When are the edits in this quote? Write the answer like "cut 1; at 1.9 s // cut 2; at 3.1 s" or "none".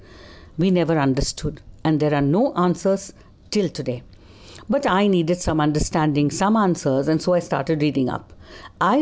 none